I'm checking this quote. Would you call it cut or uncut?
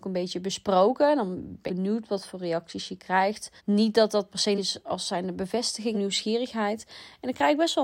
cut